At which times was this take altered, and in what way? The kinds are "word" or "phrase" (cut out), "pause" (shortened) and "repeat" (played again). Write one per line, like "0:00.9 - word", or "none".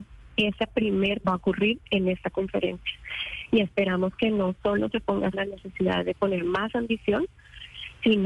0:01.2 - phrase
0:05.3 - phrase